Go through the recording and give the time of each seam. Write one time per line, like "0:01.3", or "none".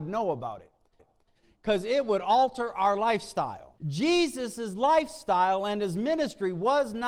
0:01.0
0:03.8

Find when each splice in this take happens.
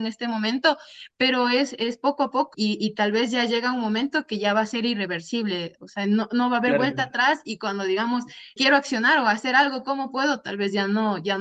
0:02.5
0:08.6

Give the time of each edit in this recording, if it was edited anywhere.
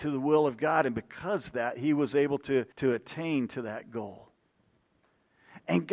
0:02.7

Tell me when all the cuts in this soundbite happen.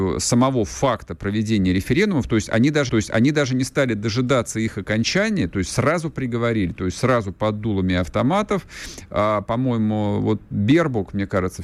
0:02.9

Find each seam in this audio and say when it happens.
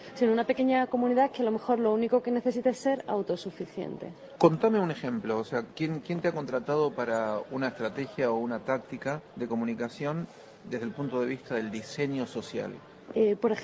none

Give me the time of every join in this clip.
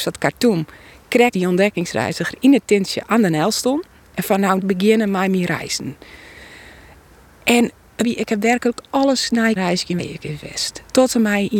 0:01.3
0:04.6
0:08.0
0:09.6
0:10.0

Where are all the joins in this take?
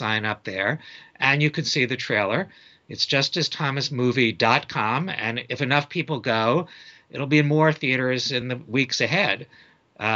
none

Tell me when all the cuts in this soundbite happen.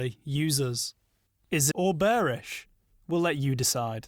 0:01.7

